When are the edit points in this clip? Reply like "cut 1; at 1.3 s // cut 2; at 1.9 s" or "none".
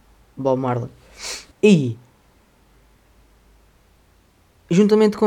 cut 1; at 1.5 s